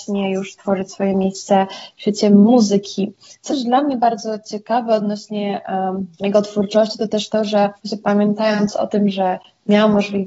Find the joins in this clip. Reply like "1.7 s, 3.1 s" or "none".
3.5 s, 6.1 s, 7.8 s